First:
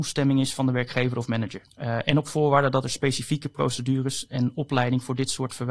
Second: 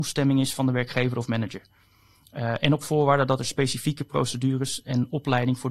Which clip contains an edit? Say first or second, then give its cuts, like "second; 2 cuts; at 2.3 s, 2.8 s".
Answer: first; 1 cut; at 1.7 s